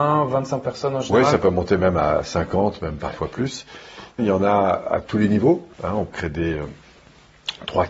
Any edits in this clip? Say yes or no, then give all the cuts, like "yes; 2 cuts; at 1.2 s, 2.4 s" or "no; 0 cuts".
yes; 3 cuts; at 4.2 s, 5.7 s, 6.1 s